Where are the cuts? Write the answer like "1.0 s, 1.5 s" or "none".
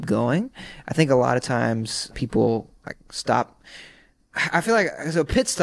2.1 s